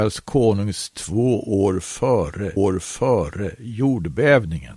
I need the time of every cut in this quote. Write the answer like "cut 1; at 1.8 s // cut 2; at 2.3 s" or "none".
cut 1; at 0.9 s // cut 2; at 2.6 s